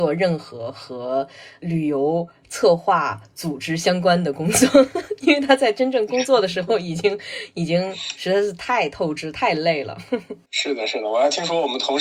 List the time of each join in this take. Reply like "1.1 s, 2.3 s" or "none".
10.5 s

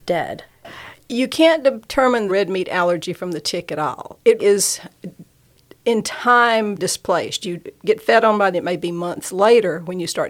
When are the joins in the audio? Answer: 2.3 s, 4.4 s, 6.8 s, 8.5 s

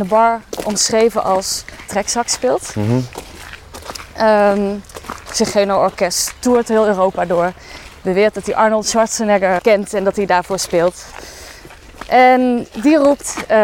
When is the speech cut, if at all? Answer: 1.9 s, 5.3 s, 9.6 s

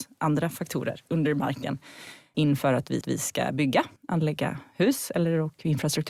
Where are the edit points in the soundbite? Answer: 2.3 s, 3.0 s, 4.0 s

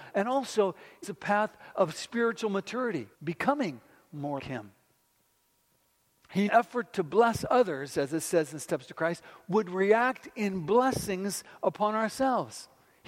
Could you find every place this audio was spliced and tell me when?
1.0 s, 3.1 s, 4.4 s, 6.5 s

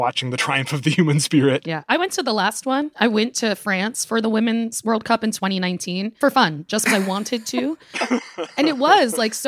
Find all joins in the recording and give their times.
6.2 s, 6.9 s

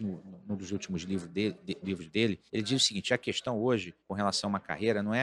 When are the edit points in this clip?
2.5 s, 4.0 s

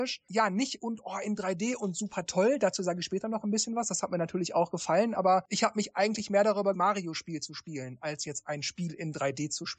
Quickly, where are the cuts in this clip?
6.7 s

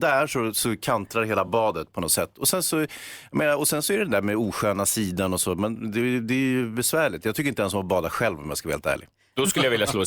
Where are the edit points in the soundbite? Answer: none

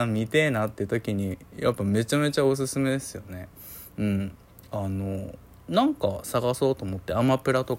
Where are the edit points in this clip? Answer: none

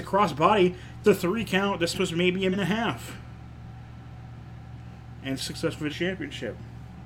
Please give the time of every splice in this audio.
1.0 s, 1.9 s, 2.5 s, 5.4 s, 5.9 s

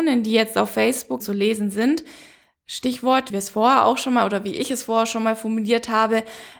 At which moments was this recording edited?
1.2 s, 3.3 s

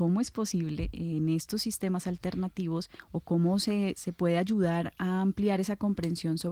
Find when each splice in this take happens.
none

